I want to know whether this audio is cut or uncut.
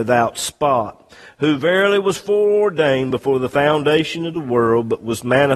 uncut